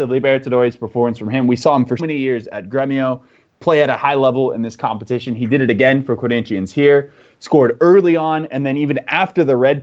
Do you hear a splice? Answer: yes; 1 cut; at 2.0 s

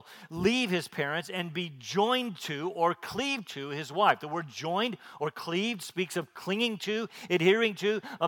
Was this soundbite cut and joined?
no; 0 cuts

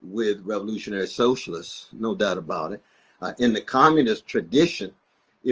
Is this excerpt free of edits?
yes; 0 cuts

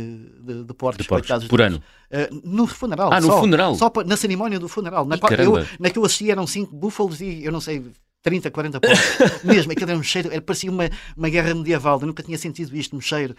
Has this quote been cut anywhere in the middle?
no; 0 cuts

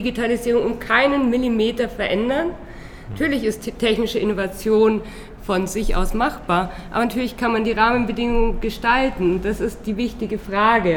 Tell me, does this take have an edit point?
no; 0 cuts

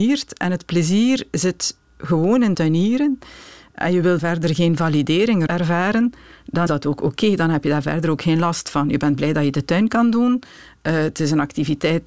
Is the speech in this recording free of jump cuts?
no; 4 cuts; at 2.5 s, 4.2 s, 5.5 s, 6.7 s

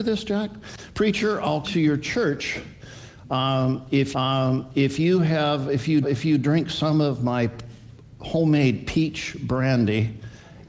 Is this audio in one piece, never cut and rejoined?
no; 3 cuts; at 1.6 s, 4.1 s, 6.0 s

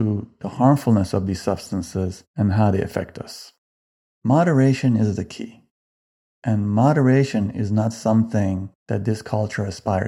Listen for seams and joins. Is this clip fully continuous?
yes; 0 cuts

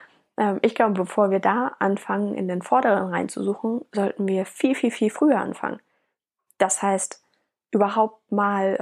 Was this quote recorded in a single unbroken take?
yes; 0 cuts

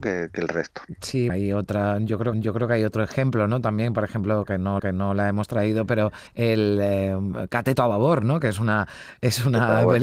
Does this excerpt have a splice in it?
yes; 4 cuts; at 1.3 s, 2.3 s, 4.8 s, 6.3 s

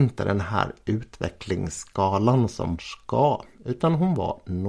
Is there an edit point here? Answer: yes; 1 cut; at 2.8 s

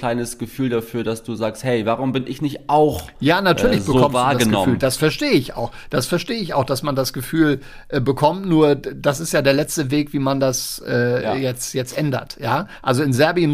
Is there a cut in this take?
no; 0 cuts

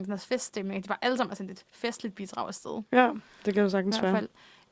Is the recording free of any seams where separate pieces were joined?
yes; 0 cuts

